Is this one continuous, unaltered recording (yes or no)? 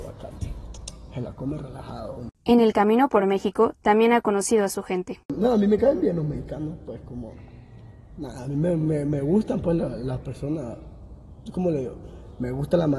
yes